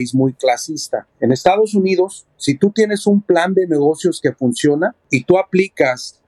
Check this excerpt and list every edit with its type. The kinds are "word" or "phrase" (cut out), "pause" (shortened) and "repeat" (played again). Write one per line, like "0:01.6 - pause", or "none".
none